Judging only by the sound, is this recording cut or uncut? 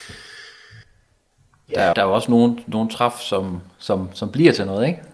cut